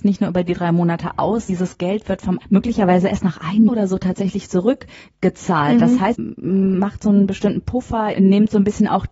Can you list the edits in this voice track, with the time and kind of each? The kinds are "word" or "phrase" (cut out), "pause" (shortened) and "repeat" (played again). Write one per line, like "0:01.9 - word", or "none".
0:01.5 - word
0:02.4 - word
0:03.7 - word
0:06.1 - word
0:08.1 - word